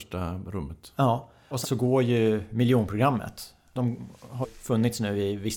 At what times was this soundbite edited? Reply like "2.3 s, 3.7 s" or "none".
1.6 s, 4.4 s